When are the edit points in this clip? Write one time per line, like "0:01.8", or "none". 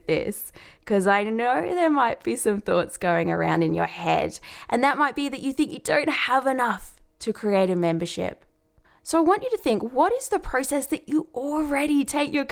none